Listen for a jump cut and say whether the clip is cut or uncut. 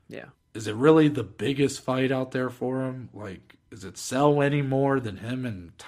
uncut